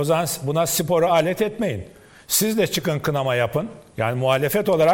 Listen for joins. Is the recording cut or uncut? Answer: uncut